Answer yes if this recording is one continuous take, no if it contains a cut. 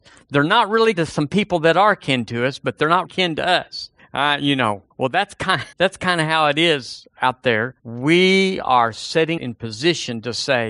no